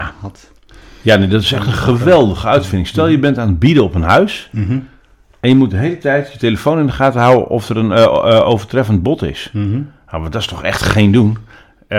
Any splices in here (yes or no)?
no